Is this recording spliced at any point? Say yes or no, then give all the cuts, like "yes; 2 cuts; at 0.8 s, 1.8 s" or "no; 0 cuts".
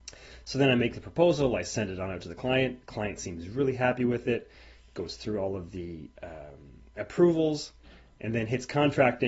no; 0 cuts